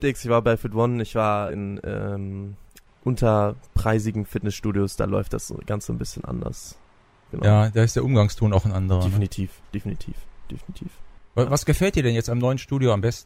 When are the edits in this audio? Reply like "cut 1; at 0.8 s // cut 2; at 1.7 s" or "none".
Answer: cut 1; at 1.5 s